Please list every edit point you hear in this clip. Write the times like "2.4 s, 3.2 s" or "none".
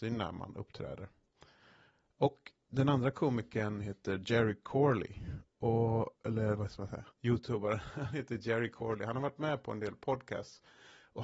6.2 s, 7.1 s